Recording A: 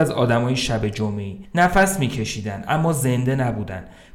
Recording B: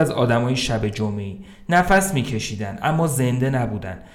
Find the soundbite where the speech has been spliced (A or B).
A